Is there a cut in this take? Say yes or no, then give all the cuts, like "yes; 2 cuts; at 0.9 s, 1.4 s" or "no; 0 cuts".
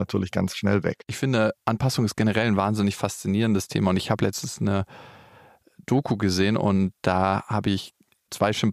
no; 0 cuts